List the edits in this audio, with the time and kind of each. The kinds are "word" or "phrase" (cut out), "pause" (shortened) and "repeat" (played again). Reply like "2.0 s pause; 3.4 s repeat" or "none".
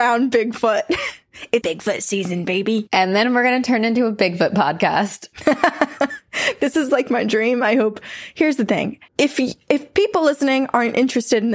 1.6 s word; 9.1 s pause